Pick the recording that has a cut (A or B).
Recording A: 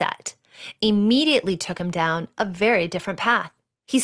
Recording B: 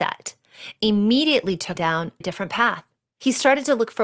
B